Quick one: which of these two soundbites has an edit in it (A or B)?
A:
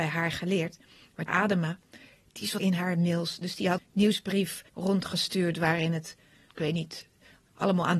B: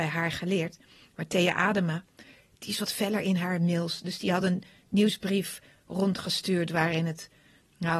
A